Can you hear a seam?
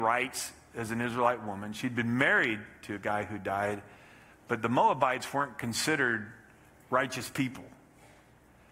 no; 0 cuts

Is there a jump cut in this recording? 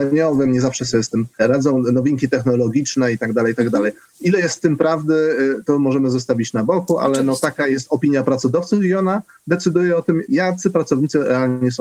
yes; 1 cut; at 1.3 s

